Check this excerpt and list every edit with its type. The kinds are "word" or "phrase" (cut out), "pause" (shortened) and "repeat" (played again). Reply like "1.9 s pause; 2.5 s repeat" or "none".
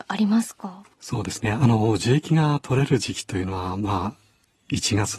0.9 s pause